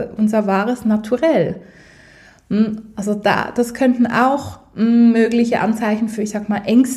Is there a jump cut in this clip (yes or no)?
no